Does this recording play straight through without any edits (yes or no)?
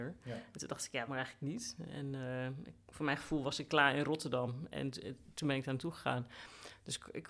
no